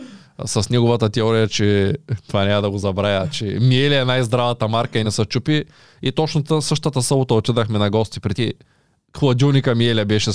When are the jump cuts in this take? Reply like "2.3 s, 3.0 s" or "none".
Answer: 5.0 s, 8.3 s